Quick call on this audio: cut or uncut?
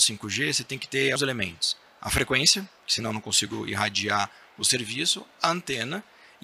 cut